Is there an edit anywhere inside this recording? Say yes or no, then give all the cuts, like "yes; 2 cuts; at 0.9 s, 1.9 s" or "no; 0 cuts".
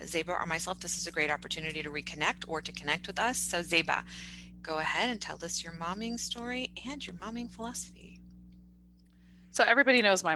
no; 0 cuts